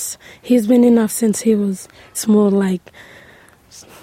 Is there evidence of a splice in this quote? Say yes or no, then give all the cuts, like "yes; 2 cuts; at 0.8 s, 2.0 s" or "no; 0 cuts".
yes; 2 cuts; at 1.1 s, 2.1 s